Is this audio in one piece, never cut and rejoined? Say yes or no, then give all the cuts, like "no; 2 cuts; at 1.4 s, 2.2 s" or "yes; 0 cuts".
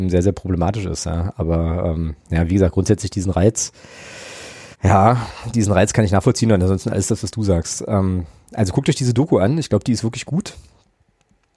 no; 1 cut; at 4.7 s